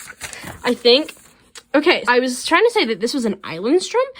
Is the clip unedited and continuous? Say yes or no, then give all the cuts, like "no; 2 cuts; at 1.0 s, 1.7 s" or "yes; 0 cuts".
no; 1 cut; at 2.0 s